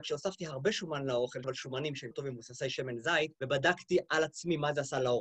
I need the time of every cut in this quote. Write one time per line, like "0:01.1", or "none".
0:01.4
0:02.1
0:03.3